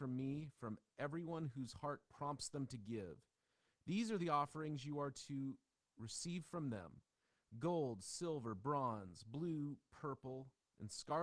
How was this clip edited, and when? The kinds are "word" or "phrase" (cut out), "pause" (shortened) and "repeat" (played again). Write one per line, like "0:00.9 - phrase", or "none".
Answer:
none